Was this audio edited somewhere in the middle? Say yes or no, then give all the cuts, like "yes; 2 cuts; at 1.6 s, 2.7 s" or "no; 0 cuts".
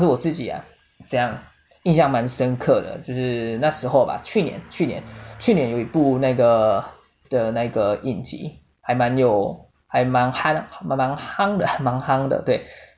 yes; 1 cut; at 7.2 s